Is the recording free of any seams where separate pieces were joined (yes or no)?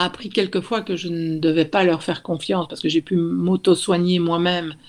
yes